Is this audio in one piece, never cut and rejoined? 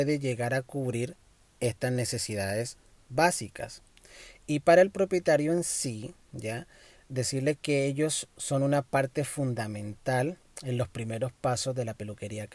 yes; 0 cuts

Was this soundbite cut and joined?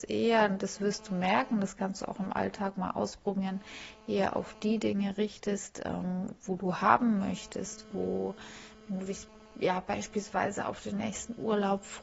no; 0 cuts

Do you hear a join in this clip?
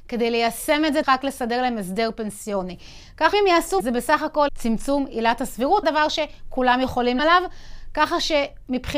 yes; 6 cuts; at 1.0 s, 3.3 s, 3.8 s, 4.5 s, 5.8 s, 7.2 s

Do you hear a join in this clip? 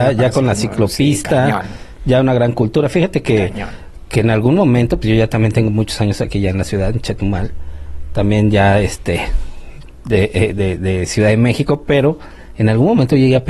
no; 0 cuts

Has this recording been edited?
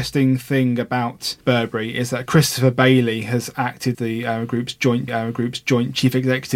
yes; 3 cuts; at 1.4 s, 3.9 s, 5.1 s

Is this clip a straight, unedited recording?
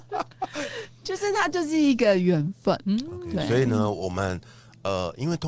yes; 0 cuts

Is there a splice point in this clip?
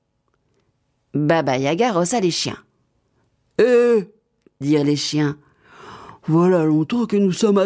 no; 0 cuts

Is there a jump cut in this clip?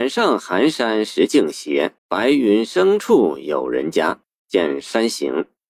yes; 2 cuts; at 2.0 s, 4.2 s

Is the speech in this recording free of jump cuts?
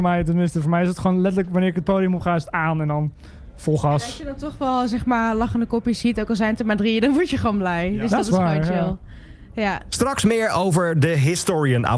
yes; 0 cuts

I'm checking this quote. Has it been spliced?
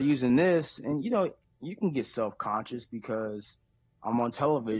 no; 0 cuts

